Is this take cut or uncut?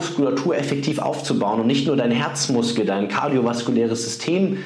uncut